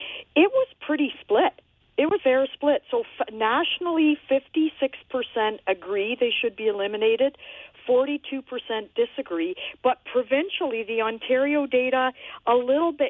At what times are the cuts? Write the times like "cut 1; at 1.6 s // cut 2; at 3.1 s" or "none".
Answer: cut 1; at 1.8 s // cut 2; at 2.2 s

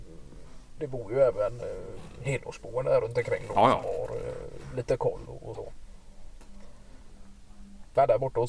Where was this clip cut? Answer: cut 1; at 5.5 s

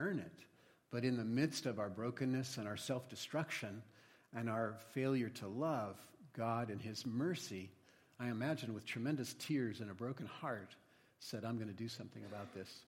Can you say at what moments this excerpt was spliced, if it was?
none

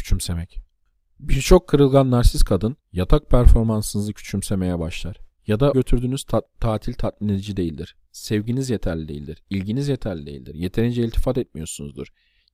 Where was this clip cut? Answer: cut 1; at 2.8 s // cut 2; at 5.3 s // cut 3; at 5.7 s

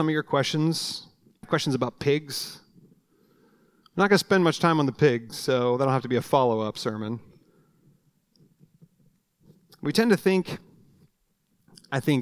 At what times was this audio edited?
cut 1; at 1.4 s

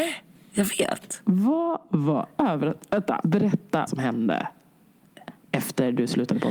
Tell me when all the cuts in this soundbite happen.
cut 1; at 3.9 s

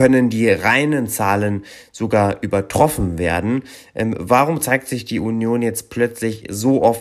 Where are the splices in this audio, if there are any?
none

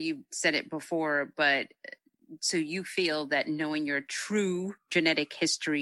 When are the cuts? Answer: none

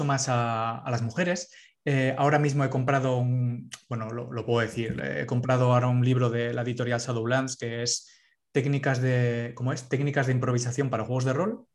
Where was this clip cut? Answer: none

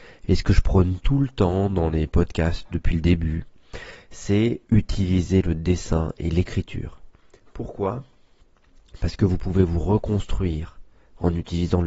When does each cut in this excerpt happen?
cut 1; at 4.6 s

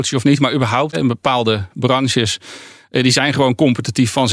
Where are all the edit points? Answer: cut 1; at 0.9 s

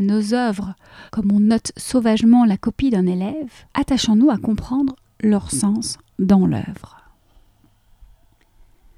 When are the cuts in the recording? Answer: cut 1; at 1.1 s // cut 2; at 3.7 s

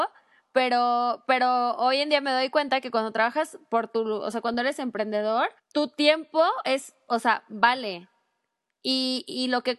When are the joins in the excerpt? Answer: cut 1; at 5.6 s

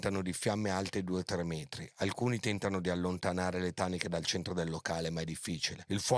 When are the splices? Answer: none

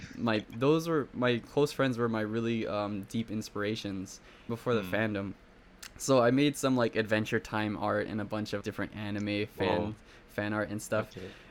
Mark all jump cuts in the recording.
cut 1; at 4.5 s // cut 2; at 8.6 s

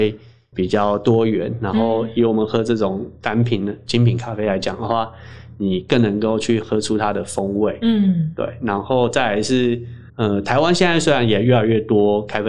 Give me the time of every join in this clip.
cut 1; at 10.1 s

